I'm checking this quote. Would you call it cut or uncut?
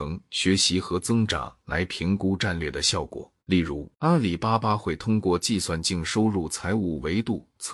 cut